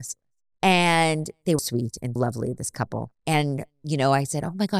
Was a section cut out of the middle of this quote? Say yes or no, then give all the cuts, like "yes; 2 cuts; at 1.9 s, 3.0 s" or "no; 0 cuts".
yes; 3 cuts; at 1.6 s, 2.2 s, 3.2 s